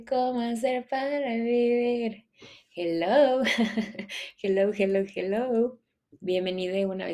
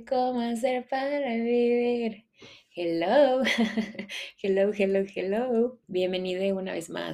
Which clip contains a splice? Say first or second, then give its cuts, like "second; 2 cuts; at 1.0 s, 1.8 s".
second; 1 cut; at 5.8 s